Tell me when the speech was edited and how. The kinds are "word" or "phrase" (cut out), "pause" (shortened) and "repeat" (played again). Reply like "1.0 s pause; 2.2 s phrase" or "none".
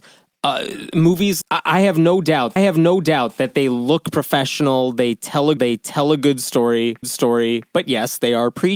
1.4 s word; 2.6 s repeat; 5.6 s repeat; 7.0 s repeat